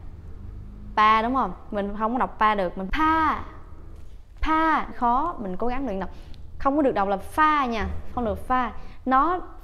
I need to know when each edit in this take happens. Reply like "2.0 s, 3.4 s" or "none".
2.9 s, 4.9 s